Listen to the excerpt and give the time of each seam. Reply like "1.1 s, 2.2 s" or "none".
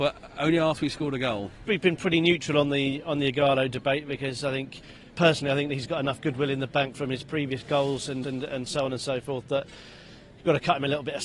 6.9 s, 8.2 s